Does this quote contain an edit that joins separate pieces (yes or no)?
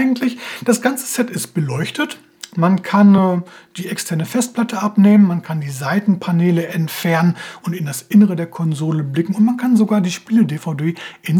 no